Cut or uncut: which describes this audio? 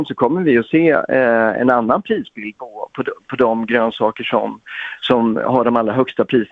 uncut